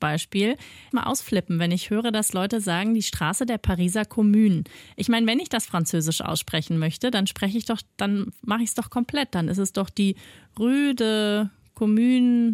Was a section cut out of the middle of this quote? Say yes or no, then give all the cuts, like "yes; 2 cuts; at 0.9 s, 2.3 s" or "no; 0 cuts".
yes; 1 cut; at 0.9 s